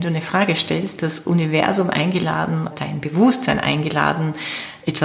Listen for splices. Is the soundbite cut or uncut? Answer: cut